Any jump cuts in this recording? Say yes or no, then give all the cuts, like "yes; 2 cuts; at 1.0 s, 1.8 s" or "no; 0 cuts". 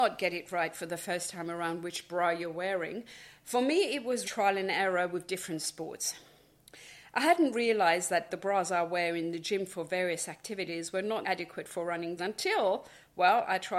yes; 3 cuts; at 4.2 s, 11.2 s, 12.2 s